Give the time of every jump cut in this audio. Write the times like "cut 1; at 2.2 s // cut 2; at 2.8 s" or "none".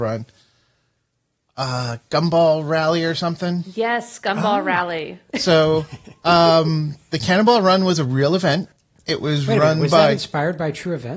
none